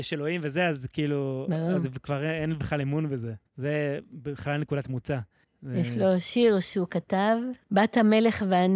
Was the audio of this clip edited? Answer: yes; 3 cuts; at 3.5 s, 5.4 s, 7.6 s

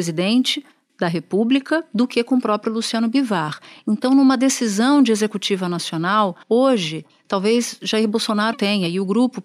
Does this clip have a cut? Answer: yes; 2 cuts; at 6.4 s, 8.5 s

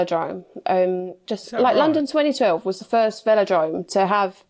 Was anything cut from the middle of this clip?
yes; 1 cut; at 1.3 s

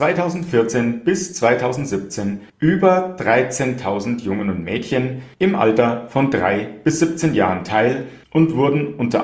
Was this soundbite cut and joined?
yes; 3 cuts; at 2.5 s, 5.3 s, 8.2 s

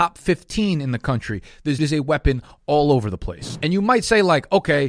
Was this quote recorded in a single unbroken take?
no; 1 cut; at 1.8 s

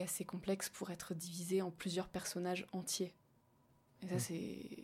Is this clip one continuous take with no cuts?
yes; 0 cuts

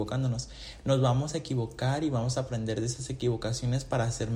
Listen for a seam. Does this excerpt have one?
no; 0 cuts

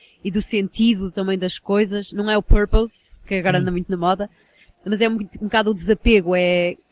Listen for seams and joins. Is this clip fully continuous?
yes; 0 cuts

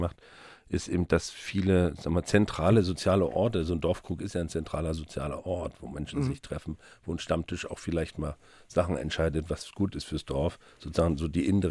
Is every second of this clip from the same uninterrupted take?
yes; 0 cuts

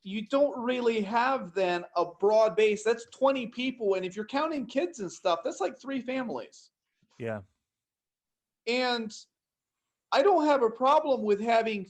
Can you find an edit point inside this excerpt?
no; 0 cuts

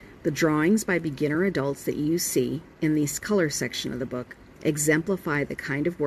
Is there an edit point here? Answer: no; 0 cuts

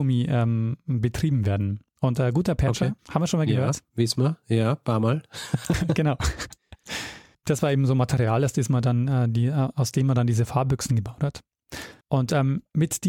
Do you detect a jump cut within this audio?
yes; 3 cuts; at 3.0 s, 7.3 s, 12.0 s

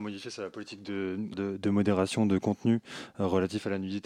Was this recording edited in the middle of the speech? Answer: yes; 1 cut; at 1.3 s

